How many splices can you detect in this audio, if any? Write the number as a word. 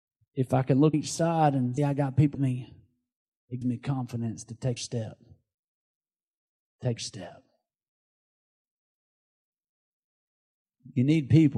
six